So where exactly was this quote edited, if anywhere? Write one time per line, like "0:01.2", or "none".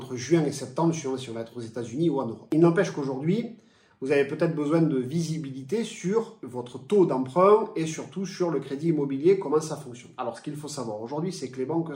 none